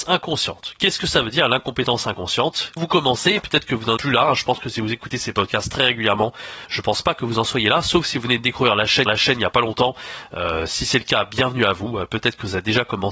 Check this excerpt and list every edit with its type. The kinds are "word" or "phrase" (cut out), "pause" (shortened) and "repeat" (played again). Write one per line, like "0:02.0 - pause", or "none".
0:02.8 - word
0:04.0 - word
0:09.1 - repeat